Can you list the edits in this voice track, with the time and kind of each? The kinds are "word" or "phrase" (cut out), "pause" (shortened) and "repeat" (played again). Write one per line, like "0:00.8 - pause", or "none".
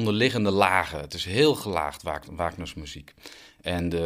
none